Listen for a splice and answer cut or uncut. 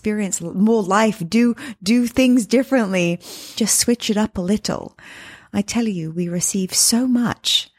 cut